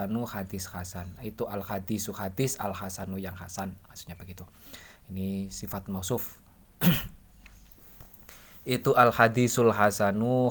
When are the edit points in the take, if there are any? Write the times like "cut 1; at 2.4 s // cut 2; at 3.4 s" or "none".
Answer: none